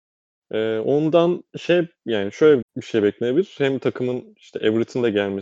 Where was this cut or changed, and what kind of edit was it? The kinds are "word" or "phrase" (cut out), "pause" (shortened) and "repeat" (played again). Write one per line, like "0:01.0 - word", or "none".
0:01.5 - pause
0:02.6 - word